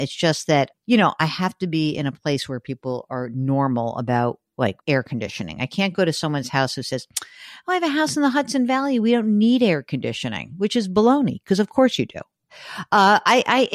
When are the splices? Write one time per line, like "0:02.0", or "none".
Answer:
0:04.8